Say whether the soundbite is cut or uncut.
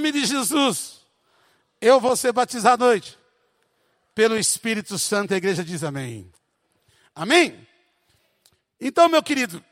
cut